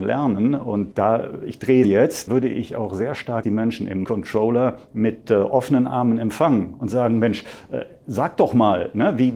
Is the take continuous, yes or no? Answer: no